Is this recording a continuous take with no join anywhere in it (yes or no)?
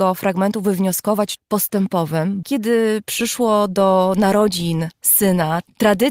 no